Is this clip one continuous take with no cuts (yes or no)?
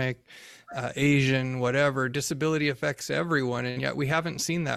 yes